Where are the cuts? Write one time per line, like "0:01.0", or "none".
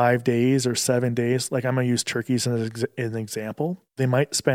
none